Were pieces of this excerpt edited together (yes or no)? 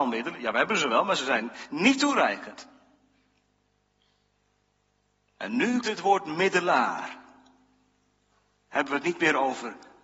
yes